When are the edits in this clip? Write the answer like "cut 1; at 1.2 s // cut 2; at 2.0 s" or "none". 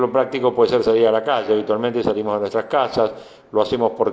none